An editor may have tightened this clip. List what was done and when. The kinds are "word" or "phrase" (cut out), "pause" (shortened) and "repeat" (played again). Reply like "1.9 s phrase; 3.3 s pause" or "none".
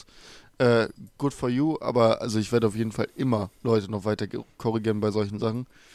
3.5 s pause